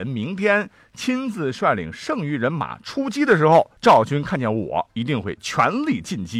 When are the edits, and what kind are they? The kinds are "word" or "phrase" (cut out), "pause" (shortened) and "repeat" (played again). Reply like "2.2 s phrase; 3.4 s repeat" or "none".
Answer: 3.8 s pause

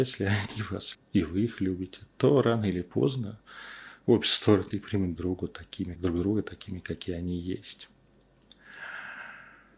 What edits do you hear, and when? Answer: 0.9 s word; 4.7 s word; 5.2 s word; 6.0 s word

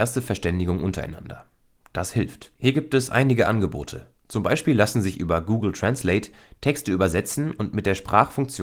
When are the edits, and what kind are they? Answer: 2.5 s pause; 4.2 s pause

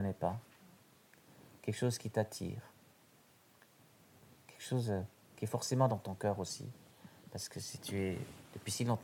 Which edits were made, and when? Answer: none

